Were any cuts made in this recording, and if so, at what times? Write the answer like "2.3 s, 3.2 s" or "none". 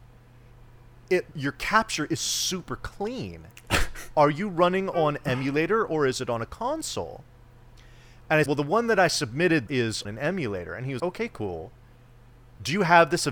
1.3 s, 8.5 s, 9.7 s, 10.0 s, 11.0 s